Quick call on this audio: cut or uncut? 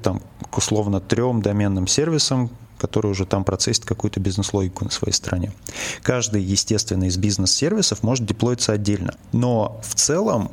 uncut